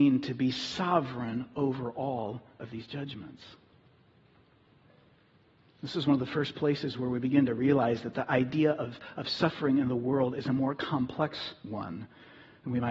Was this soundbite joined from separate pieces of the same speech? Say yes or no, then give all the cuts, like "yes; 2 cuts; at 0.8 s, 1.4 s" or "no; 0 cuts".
no; 0 cuts